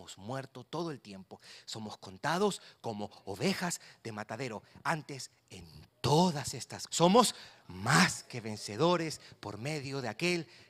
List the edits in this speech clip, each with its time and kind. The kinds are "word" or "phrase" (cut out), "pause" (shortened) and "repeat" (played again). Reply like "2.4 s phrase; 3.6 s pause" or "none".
6.9 s word